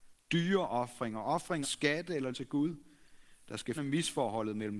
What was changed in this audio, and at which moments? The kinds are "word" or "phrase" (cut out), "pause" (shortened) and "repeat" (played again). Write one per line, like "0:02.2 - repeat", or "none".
0:01.6 - word
0:02.3 - word
0:03.7 - word